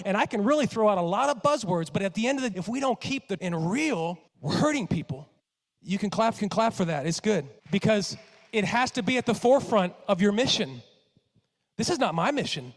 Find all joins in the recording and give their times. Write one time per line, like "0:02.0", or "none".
0:02.5
0:03.4
0:04.3
0:05.4
0:06.4
0:07.6